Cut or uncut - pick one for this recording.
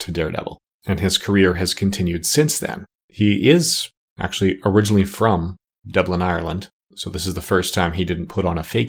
uncut